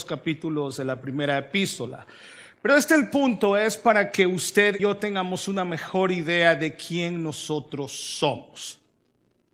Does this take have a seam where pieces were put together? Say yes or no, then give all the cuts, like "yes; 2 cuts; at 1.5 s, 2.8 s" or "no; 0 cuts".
yes; 1 cut; at 4.8 s